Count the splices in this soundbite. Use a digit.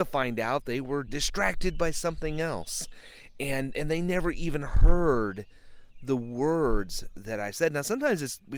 0